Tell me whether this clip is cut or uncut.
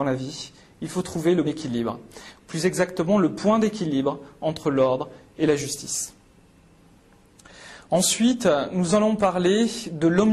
cut